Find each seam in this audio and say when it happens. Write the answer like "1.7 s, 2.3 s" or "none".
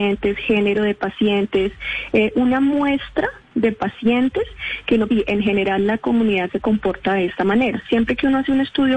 5.1 s